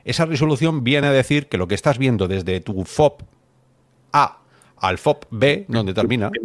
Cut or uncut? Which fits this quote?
uncut